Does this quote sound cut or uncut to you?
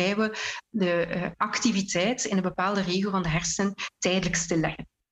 uncut